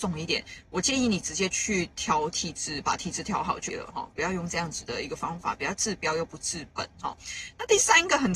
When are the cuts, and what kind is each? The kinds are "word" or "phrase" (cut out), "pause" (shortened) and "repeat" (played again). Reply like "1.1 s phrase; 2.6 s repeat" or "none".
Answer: 3.7 s word

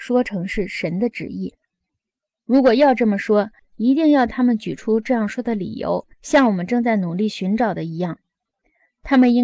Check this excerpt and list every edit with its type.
6.1 s pause

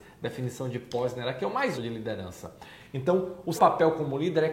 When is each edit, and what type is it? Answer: 1.7 s word; 3.6 s word

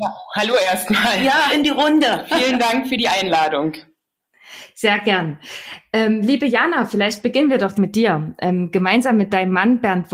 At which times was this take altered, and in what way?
1.5 s word; 7.7 s word

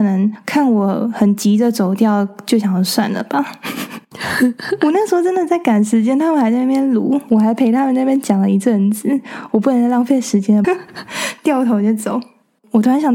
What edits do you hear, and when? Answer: 9.5 s phrase; 10.6 s phrase

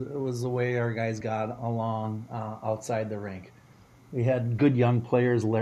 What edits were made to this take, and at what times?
none

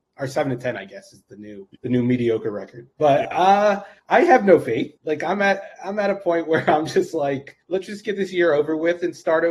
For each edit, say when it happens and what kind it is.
1.8 s pause; 2.9 s pause; 4.0 s pause; 5.0 s pause; 7.6 s pause

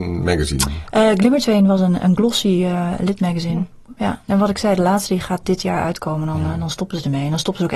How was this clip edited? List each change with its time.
4.0 s pause

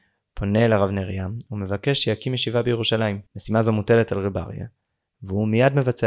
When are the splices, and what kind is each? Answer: 3.3 s pause

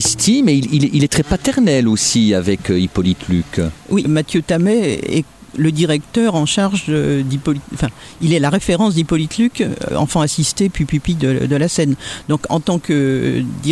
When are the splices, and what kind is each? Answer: 4.1 s word; 9.9 s word

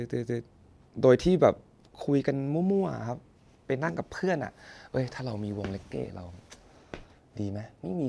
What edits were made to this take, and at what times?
none

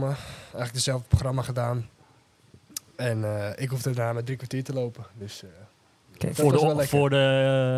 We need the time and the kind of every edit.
none

